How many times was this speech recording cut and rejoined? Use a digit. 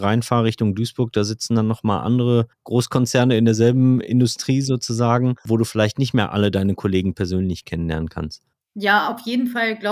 2